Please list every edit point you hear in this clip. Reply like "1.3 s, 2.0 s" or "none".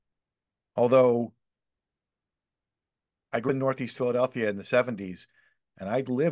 3.5 s